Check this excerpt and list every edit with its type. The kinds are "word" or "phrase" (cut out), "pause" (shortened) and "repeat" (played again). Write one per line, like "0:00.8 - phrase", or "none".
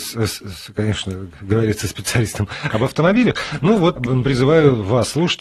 0:04.0 - phrase